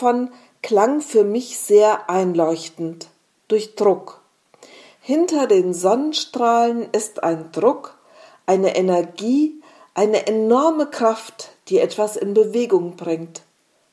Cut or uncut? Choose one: uncut